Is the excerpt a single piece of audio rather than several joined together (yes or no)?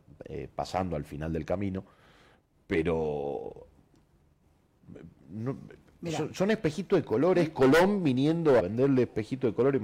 no